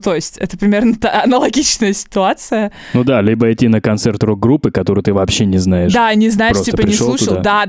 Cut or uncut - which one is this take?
uncut